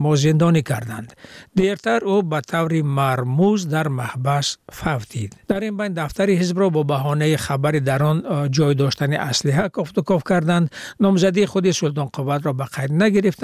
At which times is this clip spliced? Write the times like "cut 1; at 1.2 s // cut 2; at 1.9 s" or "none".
cut 1; at 5.4 s